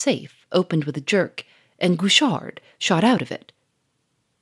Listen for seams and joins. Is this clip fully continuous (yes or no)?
yes